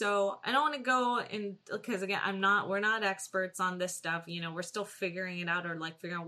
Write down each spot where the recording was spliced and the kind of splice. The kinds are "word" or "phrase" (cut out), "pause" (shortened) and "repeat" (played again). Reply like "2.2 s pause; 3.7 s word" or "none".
none